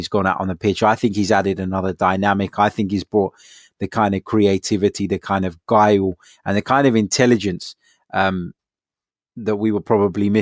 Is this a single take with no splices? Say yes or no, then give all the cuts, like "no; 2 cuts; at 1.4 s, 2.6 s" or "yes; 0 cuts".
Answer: yes; 0 cuts